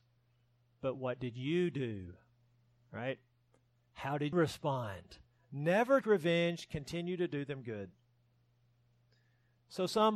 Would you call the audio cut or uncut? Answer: cut